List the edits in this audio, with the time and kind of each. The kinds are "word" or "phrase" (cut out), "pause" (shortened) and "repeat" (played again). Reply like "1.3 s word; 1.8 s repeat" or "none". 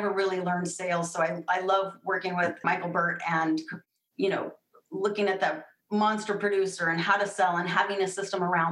2.6 s word

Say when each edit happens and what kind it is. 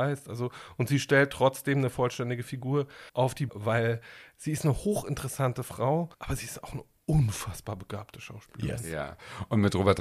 3.1 s pause; 3.5 s phrase; 6.1 s pause

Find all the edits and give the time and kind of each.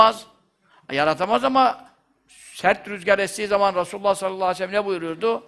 none

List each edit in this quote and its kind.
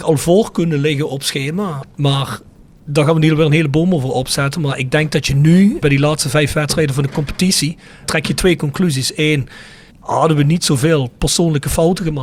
9.9 s word

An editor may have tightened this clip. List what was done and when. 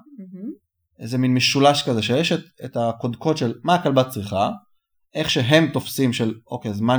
none

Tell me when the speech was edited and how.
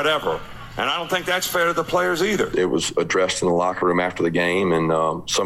none

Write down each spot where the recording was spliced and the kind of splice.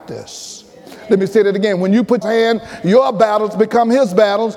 2.2 s phrase

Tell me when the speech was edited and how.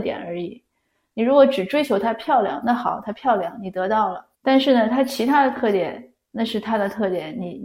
4.3 s pause

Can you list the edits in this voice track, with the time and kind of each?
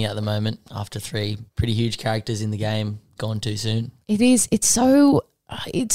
1.5 s pause; 3.2 s word; 4.0 s pause

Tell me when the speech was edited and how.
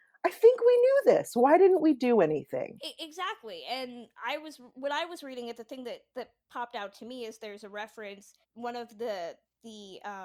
8.4 s pause

